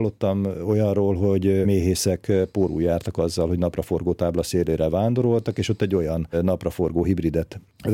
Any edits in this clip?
no; 0 cuts

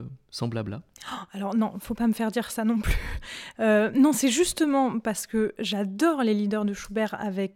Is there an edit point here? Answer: no; 0 cuts

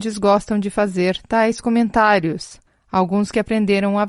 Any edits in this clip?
no; 0 cuts

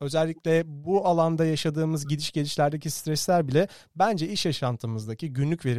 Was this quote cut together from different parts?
no; 0 cuts

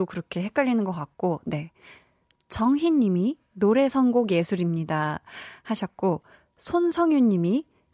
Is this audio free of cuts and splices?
yes; 0 cuts

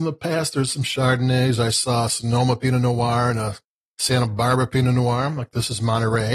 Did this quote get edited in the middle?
no; 0 cuts

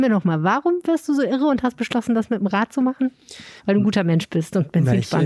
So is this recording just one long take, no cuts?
no; 1 cut; at 3.6 s

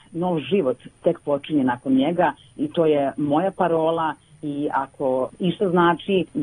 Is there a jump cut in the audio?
no; 0 cuts

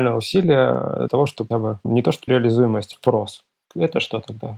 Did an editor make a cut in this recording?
yes; 4 cuts; at 1.1 s, 1.5 s, 2.3 s, 2.9 s

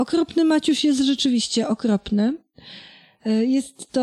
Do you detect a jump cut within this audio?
no; 0 cuts

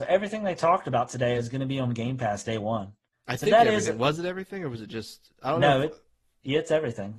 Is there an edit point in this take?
no; 0 cuts

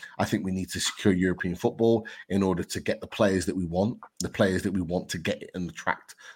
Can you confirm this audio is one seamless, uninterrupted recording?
no; 1 cut; at 4.1 s

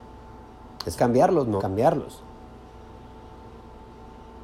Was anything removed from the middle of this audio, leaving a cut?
yes; 2 cuts; at 1.0 s, 1.6 s

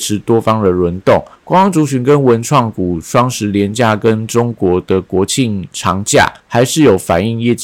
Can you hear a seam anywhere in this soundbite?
yes; 2 cuts; at 1.4 s, 6.4 s

